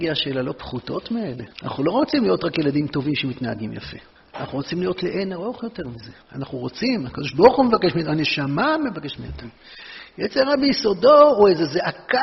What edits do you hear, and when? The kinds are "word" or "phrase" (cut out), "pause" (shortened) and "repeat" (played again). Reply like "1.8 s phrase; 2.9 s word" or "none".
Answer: 1.5 s pause; 4.2 s pause; 6.2 s pause